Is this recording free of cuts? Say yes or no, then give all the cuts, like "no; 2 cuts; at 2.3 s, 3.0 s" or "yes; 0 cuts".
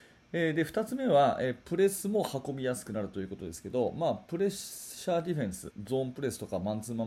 no; 1 cut; at 5.7 s